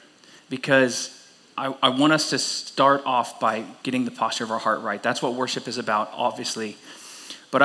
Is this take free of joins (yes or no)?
yes